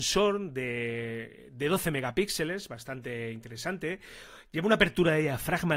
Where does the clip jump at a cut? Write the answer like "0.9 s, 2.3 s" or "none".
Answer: none